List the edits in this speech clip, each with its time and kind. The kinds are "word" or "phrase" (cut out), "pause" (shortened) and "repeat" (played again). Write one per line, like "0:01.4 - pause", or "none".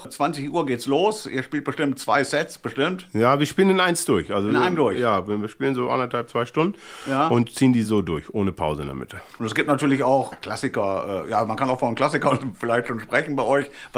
none